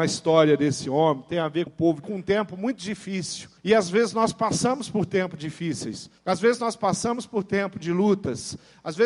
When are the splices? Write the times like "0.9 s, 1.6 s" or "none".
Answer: 1.7 s, 2.0 s, 3.6 s, 6.2 s